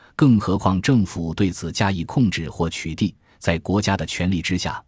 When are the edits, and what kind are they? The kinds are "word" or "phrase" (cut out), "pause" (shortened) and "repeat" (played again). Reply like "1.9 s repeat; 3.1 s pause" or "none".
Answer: none